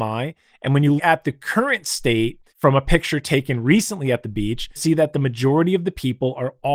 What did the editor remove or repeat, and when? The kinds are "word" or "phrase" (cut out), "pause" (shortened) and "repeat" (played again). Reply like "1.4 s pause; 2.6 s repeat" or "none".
1.0 s word; 2.5 s pause; 4.8 s word